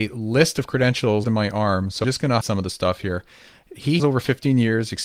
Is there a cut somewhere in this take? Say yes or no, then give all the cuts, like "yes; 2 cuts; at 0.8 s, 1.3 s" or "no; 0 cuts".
yes; 4 cuts; at 1.2 s, 2.0 s, 2.4 s, 4.0 s